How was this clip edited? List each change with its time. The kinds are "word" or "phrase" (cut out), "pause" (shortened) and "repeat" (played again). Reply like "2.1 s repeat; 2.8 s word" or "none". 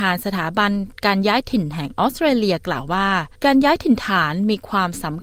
3.4 s pause